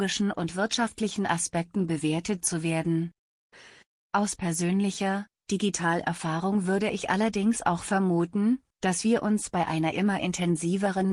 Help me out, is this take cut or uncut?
uncut